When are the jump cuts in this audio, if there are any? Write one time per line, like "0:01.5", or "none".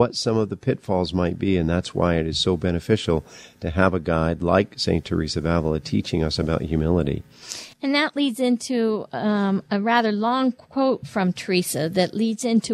0:07.7